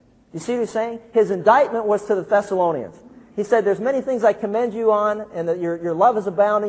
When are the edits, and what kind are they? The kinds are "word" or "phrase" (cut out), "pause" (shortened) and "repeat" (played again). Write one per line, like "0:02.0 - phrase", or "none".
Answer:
none